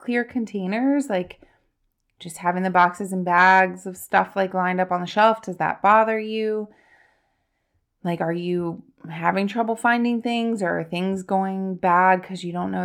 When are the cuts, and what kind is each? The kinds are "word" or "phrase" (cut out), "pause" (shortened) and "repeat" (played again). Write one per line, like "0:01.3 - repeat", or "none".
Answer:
none

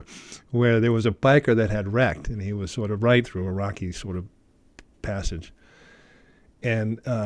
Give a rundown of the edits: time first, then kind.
0:03.2 - phrase

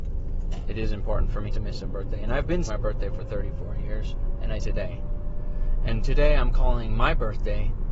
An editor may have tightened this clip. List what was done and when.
0:01.5 - word
0:02.7 - word
0:04.6 - word

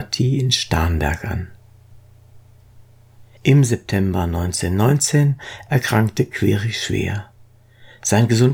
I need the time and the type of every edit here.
none

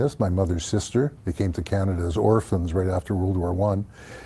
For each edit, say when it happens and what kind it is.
0:01.2 - pause

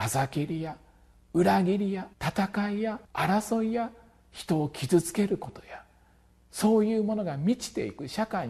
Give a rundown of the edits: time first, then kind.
0:02.1 - pause
0:03.0 - pause

